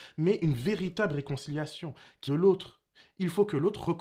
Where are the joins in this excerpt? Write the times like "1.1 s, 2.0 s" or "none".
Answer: 2.3 s